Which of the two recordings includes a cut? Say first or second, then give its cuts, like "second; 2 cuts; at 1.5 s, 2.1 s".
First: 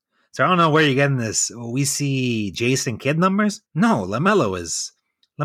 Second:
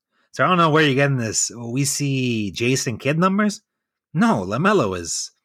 first; 1 cut; at 3.7 s